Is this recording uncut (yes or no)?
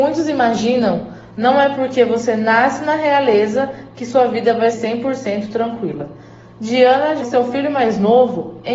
no